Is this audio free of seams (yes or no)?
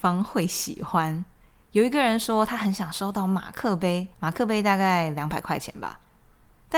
no